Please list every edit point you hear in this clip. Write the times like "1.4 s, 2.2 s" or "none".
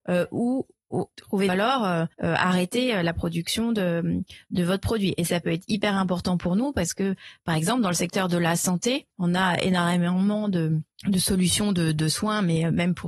1.5 s, 2.1 s, 9.1 s, 10.9 s